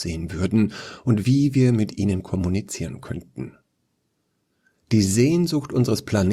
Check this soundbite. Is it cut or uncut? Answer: uncut